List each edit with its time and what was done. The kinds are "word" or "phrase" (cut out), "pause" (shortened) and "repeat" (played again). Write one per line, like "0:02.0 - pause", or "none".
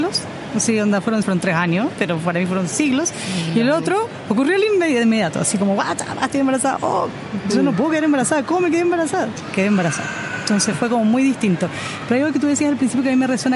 0:01.2 - word